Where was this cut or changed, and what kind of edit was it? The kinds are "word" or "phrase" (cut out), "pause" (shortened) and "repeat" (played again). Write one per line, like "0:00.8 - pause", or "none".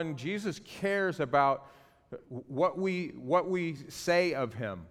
none